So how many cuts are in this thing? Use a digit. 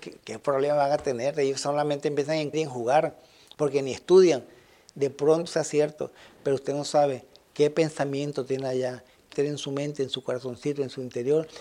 3